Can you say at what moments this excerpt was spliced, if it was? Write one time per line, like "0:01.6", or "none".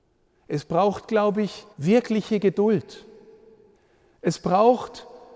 0:01.7
0:03.7